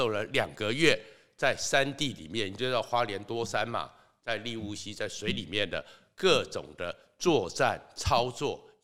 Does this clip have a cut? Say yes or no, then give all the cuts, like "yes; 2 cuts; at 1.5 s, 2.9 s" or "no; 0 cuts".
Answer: no; 0 cuts